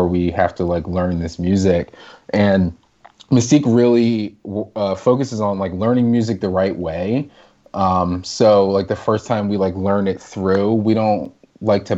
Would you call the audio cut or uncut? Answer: uncut